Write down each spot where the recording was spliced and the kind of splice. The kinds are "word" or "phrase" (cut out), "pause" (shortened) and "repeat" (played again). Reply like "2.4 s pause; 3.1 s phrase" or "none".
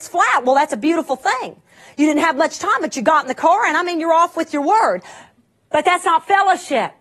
none